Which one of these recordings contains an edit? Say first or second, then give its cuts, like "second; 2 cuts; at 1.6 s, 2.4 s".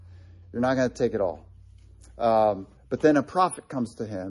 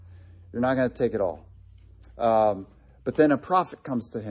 first; 1 cut; at 2.8 s